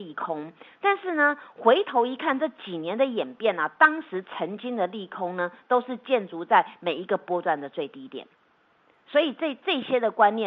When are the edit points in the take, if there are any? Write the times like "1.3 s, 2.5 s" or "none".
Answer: none